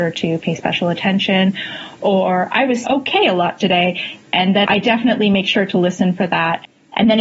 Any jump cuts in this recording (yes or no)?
yes